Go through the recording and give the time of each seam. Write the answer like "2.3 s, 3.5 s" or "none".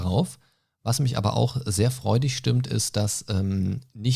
none